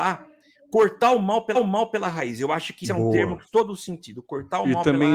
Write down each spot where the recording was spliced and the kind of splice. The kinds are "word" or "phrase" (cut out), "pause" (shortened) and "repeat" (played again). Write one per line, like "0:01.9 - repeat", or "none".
0:01.5 - repeat
0:02.8 - word
0:03.5 - word